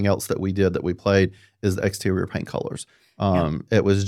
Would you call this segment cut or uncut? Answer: uncut